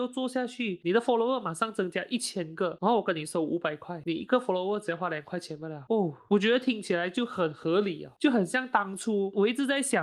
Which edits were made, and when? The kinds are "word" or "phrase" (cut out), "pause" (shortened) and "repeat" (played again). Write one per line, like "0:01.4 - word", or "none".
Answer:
none